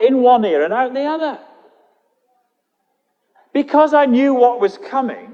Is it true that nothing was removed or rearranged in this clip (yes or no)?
yes